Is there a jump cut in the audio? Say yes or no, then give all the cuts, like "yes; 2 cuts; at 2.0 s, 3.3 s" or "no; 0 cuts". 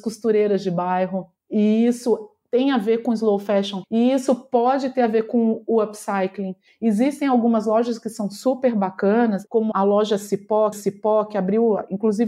yes; 3 cuts; at 3.8 s, 9.7 s, 10.7 s